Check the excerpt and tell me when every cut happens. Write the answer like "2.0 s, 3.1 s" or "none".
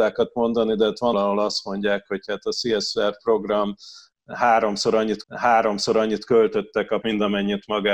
1.1 s, 5.2 s, 7.0 s